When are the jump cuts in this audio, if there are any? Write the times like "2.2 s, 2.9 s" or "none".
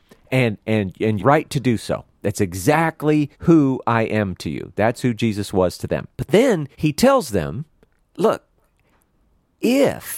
1.2 s, 2.1 s, 3.3 s, 6.1 s, 6.7 s, 8.0 s

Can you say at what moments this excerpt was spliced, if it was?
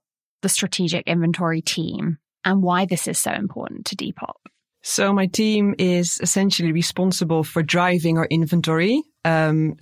none

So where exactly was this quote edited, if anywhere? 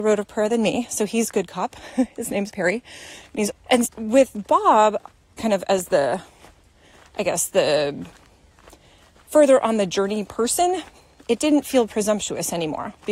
2.5 s, 3.5 s, 3.8 s, 5.4 s

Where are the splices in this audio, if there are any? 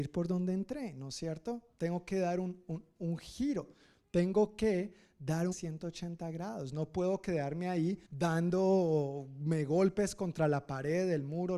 5.5 s, 8.0 s

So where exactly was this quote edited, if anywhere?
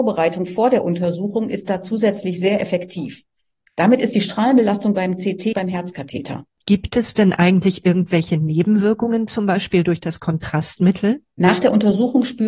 5.5 s, 6.5 s

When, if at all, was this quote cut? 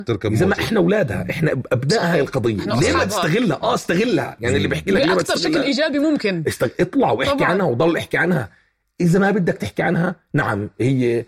none

